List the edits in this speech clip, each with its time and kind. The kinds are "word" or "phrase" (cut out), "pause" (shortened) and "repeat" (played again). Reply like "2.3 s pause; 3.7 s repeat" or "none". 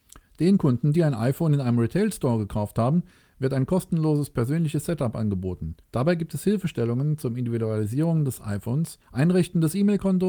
5.8 s pause; 9.0 s pause